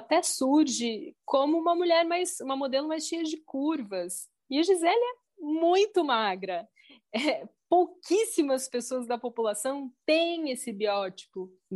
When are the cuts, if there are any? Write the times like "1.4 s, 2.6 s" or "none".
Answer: none